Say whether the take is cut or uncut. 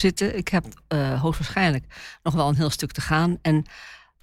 uncut